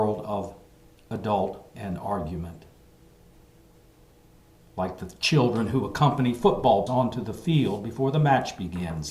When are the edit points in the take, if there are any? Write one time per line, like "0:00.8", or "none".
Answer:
0:01.7
0:06.9